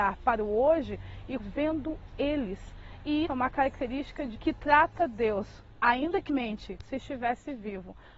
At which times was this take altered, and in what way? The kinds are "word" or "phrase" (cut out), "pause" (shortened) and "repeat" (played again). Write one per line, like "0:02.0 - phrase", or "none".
0:01.4 - word
0:03.2 - word
0:04.3 - word
0:06.3 - word
0:06.8 - word